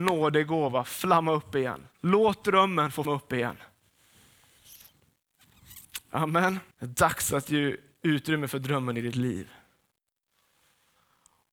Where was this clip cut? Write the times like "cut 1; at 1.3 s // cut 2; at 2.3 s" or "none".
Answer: cut 1; at 1.9 s // cut 2; at 3.0 s // cut 3; at 6.7 s